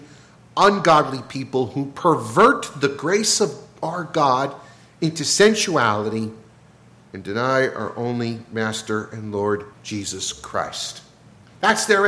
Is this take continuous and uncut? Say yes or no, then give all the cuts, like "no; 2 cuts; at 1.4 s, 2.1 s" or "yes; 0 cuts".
no; 1 cut; at 9.7 s